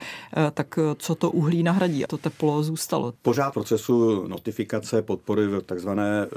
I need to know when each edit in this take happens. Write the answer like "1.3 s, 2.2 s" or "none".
2.1 s, 3.5 s